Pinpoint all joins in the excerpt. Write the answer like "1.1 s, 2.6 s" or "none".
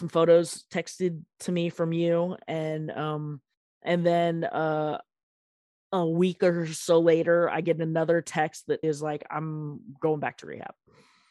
3.5 s, 5.5 s, 8.8 s

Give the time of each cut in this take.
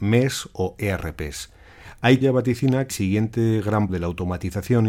2.2 s, 2.9 s, 3.9 s

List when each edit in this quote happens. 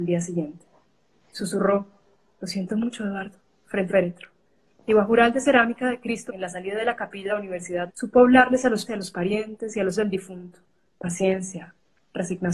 3.9 s, 5.1 s, 6.3 s, 7.3 s, 7.9 s, 8.9 s, 10.0 s

